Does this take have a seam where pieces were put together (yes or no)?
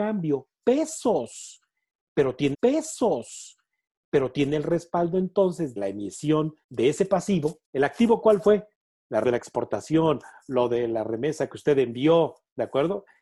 yes